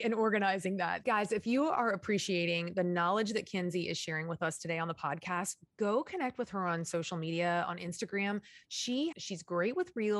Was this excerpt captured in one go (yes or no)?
no